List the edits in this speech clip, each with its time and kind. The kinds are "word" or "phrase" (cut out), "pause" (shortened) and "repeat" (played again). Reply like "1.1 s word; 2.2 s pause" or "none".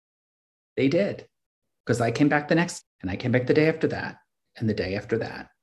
2.8 s word